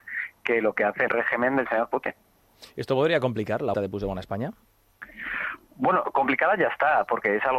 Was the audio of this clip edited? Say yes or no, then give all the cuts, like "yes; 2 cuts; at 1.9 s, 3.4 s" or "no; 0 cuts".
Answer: yes; 2 cuts; at 1.1 s, 3.7 s